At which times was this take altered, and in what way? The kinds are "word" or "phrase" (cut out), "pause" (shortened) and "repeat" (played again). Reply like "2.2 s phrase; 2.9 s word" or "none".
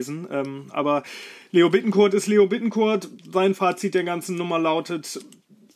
none